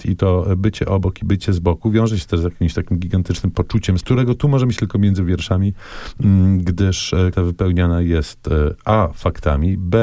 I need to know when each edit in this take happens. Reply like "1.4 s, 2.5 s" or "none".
4.0 s, 4.8 s, 7.3 s